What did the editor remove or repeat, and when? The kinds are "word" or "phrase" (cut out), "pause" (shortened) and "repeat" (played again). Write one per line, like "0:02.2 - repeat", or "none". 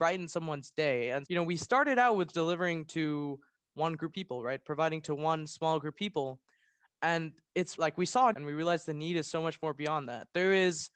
0:01.2 - word
0:02.3 - word
0:04.1 - word
0:05.9 - word
0:07.8 - word
0:08.3 - word